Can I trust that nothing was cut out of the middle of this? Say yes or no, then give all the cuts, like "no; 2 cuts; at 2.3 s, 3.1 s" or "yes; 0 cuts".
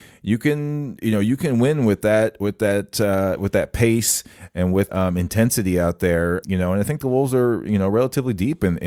no; 2 cuts; at 4.9 s, 6.4 s